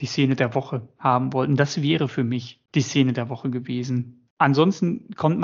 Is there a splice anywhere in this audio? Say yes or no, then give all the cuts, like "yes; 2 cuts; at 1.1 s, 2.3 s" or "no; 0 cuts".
yes; 2 cuts; at 2.7 s, 4.3 s